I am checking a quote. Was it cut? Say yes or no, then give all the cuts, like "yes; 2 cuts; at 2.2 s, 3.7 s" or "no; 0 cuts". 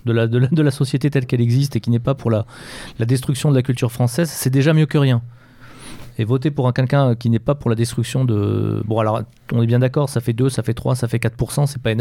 no; 0 cuts